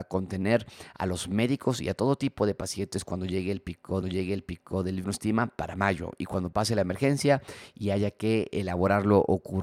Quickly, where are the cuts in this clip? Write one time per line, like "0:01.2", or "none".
0:04.0
0:05.0